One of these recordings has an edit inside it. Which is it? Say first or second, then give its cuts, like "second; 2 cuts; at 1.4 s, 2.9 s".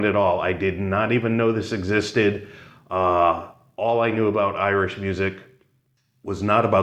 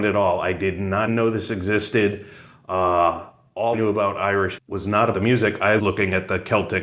second; 5 cuts; at 1.1 s, 3.7 s, 4.6 s, 5.1 s, 5.8 s